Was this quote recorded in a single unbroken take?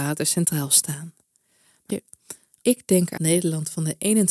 no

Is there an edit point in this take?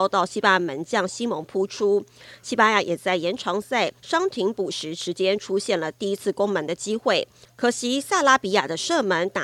yes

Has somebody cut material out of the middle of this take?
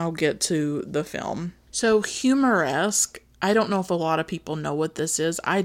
no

